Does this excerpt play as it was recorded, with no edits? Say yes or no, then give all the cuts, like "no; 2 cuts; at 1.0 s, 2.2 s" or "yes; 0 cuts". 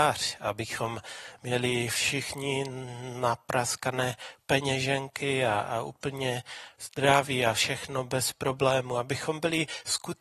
no; 1 cut; at 6.7 s